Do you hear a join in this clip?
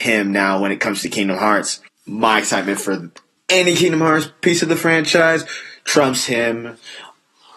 yes; 2 cuts; at 1.9 s, 3.4 s

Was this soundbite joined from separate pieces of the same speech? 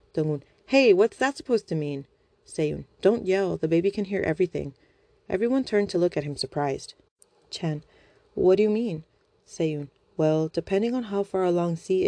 no; 0 cuts

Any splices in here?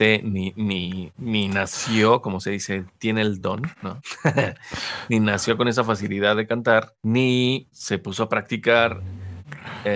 no; 0 cuts

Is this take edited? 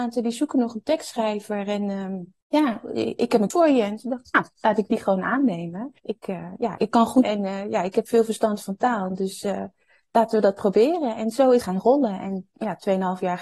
yes; 6 cuts; at 2.4 s, 3.5 s, 6.0 s, 6.8 s, 7.2 s, 11.6 s

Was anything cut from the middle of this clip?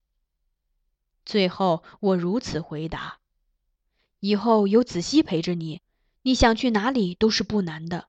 no; 0 cuts

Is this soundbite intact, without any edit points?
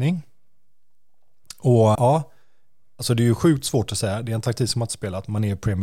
no; 1 cut; at 1.9 s

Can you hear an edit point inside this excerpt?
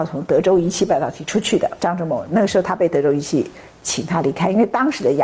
yes; 1 cut; at 1.8 s

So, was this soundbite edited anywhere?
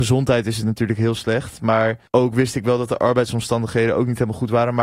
yes; 1 cut; at 2.1 s

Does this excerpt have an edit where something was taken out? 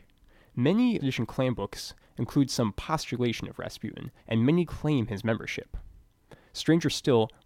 yes; 3 cuts; at 1.0 s, 4.2 s, 4.7 s

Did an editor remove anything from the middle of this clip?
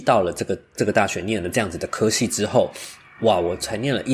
no; 0 cuts

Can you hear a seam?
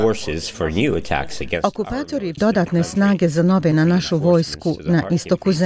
yes; 2 cuts; at 2.4 s, 3.7 s

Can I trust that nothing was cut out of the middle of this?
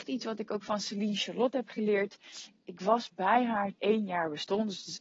no; 1 cut; at 3.7 s

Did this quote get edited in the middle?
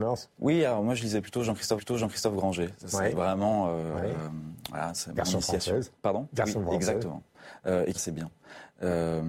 yes; 4 cuts; at 1.8 s, 3.1 s, 5.9 s, 7.9 s

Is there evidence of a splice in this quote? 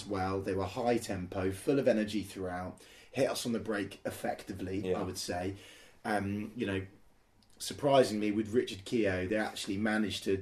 no; 0 cuts

